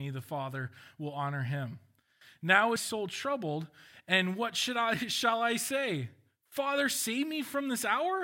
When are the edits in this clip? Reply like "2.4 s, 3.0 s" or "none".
2.8 s